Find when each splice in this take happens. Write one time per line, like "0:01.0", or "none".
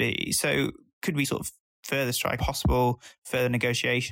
0:01.2
0:02.4